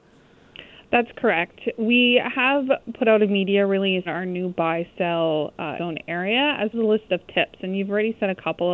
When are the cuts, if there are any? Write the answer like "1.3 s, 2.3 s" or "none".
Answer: 4.1 s, 5.8 s, 6.7 s